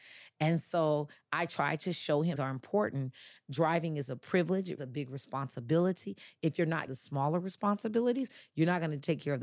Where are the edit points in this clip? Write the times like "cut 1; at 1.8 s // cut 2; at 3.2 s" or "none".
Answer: cut 1; at 2.4 s // cut 2; at 4.8 s // cut 3; at 6.9 s

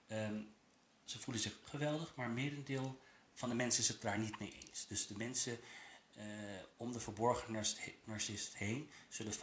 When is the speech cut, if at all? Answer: cut 1; at 1.6 s // cut 2; at 3.3 s // cut 3; at 6.7 s

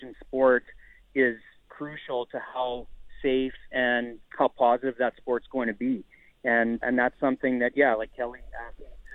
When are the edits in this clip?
cut 1; at 4.2 s // cut 2; at 6.8 s

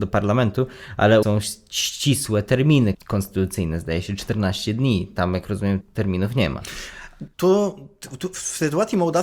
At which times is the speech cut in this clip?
cut 1; at 1.2 s // cut 2; at 2.9 s // cut 3; at 5.8 s // cut 4; at 7.3 s

